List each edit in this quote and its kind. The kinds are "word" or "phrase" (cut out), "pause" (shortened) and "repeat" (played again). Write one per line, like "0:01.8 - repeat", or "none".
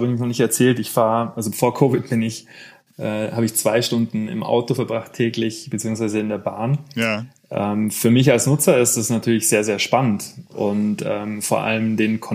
none

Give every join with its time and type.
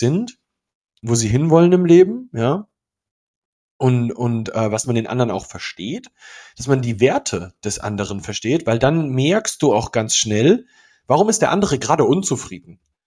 0:04.8 - phrase

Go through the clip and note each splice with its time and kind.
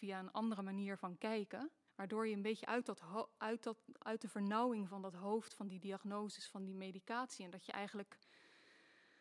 0:01.9 - pause

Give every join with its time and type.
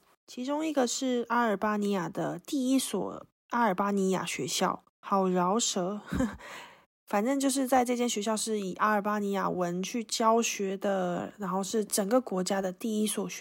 0:04.9 - pause

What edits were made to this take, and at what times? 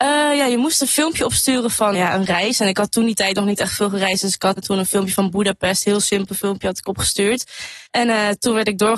0:01.9 - word
0:04.6 - word
0:07.9 - pause

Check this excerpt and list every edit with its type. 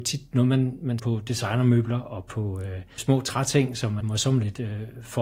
0:01.0 - word
0:03.0 - word
0:04.0 - word

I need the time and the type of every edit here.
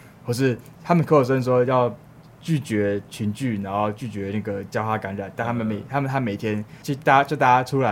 none

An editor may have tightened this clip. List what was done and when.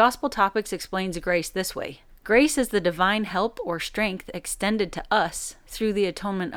0:02.1 - pause

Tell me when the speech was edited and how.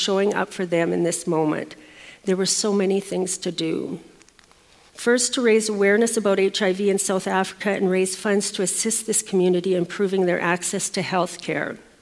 none

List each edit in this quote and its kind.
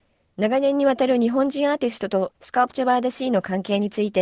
0:02.3 - pause

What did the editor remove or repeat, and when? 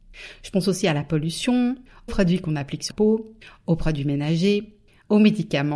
0:02.1 - word
0:02.9 - word

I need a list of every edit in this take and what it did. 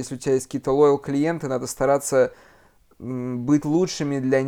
none

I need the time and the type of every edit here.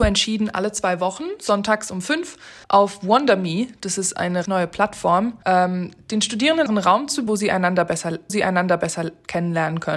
0:02.6 - pause
0:04.5 - word
0:05.4 - pause
0:06.7 - word
0:07.3 - word
0:08.3 - repeat

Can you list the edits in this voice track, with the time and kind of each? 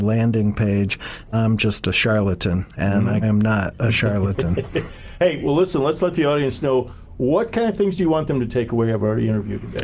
0:01.3 - word
0:03.2 - phrase

